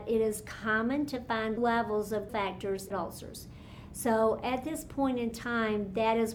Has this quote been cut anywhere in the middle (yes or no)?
yes